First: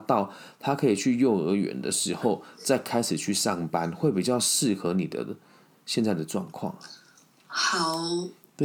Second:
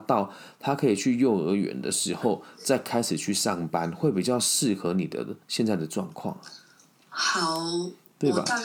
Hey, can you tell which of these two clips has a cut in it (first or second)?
second